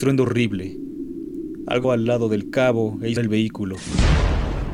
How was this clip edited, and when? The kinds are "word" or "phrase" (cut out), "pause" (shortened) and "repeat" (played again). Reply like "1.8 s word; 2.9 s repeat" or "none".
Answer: 1.8 s word; 3.2 s word